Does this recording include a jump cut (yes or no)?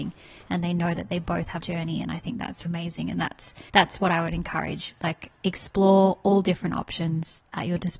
yes